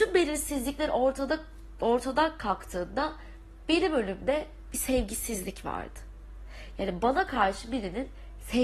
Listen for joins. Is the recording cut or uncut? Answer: uncut